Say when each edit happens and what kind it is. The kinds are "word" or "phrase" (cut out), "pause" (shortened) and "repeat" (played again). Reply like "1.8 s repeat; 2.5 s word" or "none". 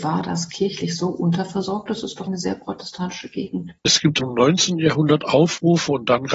2.3 s word; 3.8 s pause; 4.2 s word